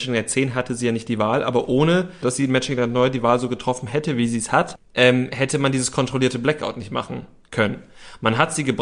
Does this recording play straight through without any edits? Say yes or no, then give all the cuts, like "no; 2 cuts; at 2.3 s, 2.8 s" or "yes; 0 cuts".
yes; 0 cuts